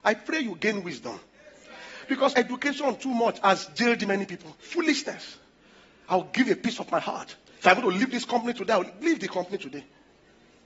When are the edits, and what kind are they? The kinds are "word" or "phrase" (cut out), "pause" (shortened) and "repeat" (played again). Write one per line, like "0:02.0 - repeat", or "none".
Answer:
0:02.3 - word
0:04.6 - pause